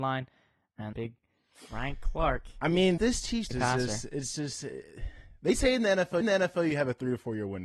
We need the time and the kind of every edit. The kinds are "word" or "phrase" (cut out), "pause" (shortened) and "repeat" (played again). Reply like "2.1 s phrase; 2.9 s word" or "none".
0.9 s word; 3.0 s word; 3.5 s word; 6.2 s repeat